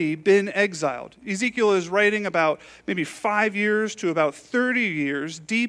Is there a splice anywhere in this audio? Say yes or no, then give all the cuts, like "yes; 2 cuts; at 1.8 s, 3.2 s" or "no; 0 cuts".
no; 0 cuts